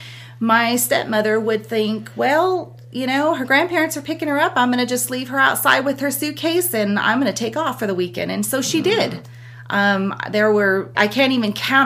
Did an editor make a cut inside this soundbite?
yes; 1 cut; at 10.9 s

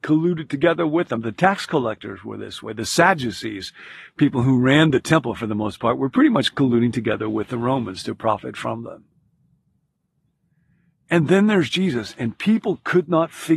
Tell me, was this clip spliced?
no; 0 cuts

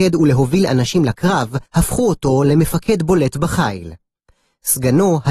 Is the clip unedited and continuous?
no; 1 cut; at 1.7 s

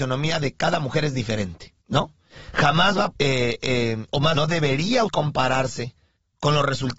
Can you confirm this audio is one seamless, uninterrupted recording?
no; 4 cuts; at 1.8 s, 3.1 s, 4.3 s, 5.1 s

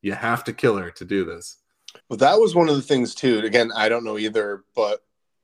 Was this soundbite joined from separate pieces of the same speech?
yes; 1 cut; at 2.0 s

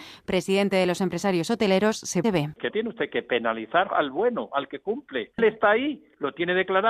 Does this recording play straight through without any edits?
no; 3 cuts; at 2.2 s, 2.7 s, 3.9 s

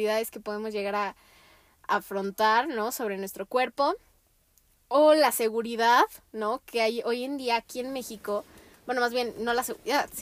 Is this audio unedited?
yes; 0 cuts

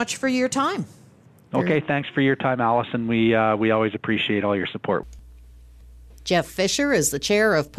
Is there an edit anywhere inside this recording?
no; 0 cuts

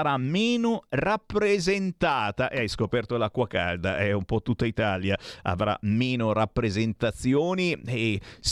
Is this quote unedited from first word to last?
yes; 0 cuts

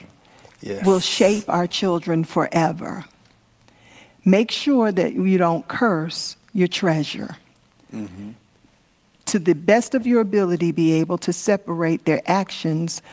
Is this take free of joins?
yes; 0 cuts

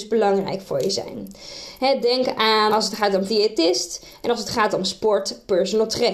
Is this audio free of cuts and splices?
no; 2 cuts; at 2.7 s, 3.3 s

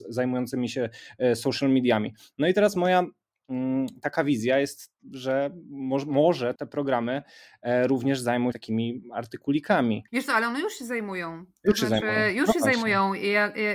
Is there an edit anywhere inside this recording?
yes; 4 cuts; at 5.0 s, 6.6 s, 8.5 s, 10.1 s

